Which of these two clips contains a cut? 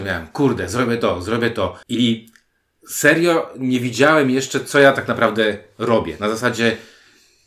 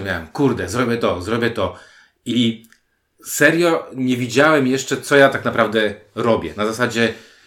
first; 1 cut; at 1.8 s

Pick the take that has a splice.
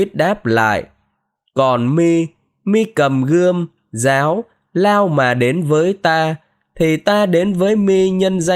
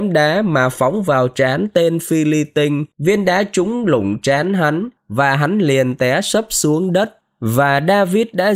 second; 2 cuts; at 2.9 s, 5.0 s

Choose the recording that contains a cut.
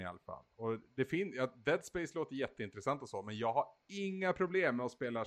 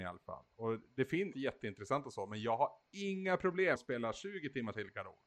second; 2 cuts; at 1.3 s, 3.8 s

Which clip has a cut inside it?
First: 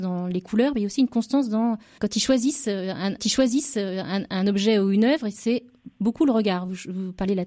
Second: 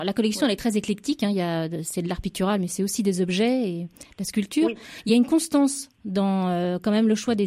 first; 2 cuts; at 2.0 s, 3.2 s

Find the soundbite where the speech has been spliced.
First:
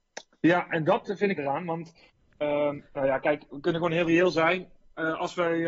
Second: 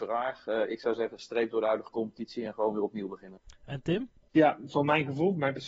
first; 2 cuts; at 1.4 s, 2.8 s

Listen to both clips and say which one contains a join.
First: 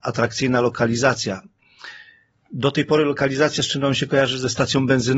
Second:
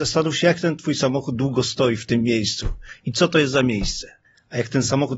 second; 1 cut; at 4.2 s

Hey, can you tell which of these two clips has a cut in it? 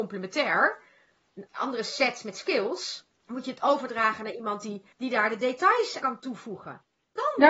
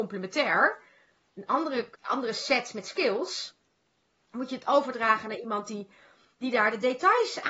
first; 4 cuts; at 1.5 s, 3.2 s, 4.9 s, 6.0 s

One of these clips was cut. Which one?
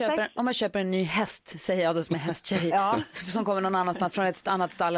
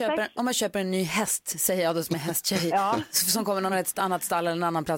second; 1 cut; at 3.7 s

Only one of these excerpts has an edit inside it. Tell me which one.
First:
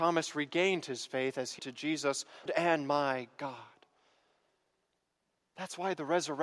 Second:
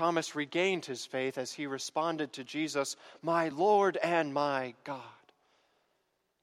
first; 2 cuts; at 1.6 s, 2.5 s

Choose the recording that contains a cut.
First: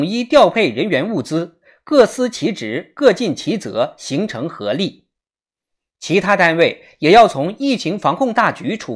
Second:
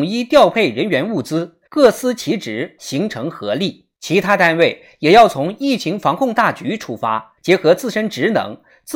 second; 4 cuts; at 1.7 s, 2.8 s, 3.9 s, 7.4 s

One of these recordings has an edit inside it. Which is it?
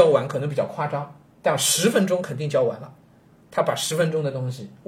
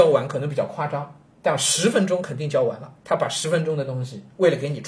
second; 1 cut; at 3.0 s

